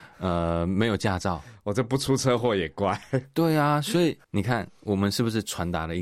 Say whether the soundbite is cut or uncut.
cut